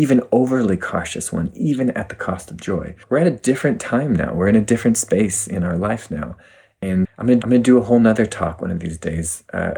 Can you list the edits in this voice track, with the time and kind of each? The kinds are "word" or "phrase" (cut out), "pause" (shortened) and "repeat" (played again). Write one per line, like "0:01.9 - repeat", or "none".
0:03.0 - pause
0:07.0 - word
0:07.4 - repeat

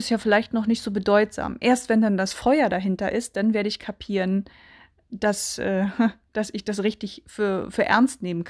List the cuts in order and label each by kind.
none

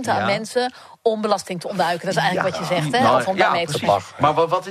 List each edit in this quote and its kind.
none

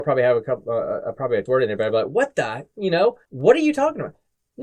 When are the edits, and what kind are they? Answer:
0:01.5 - word
0:03.2 - pause

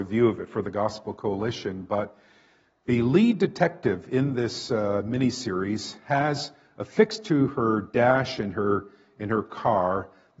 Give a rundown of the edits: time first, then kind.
none

